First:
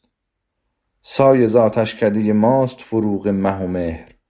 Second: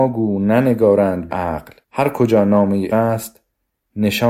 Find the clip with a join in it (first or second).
second